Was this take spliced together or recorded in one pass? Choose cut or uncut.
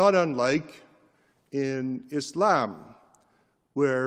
uncut